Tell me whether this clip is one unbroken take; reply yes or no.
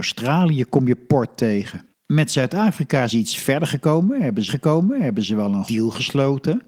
no